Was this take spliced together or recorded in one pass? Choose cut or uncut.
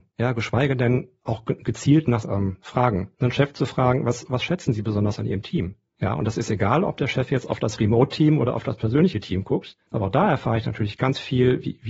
cut